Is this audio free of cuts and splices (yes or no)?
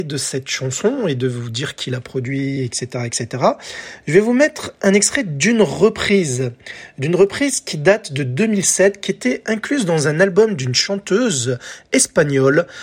yes